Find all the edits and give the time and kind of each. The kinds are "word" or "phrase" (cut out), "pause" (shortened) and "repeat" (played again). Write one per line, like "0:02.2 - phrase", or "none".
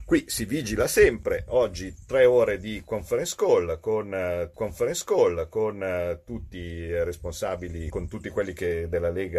0:04.5 - repeat
0:07.9 - word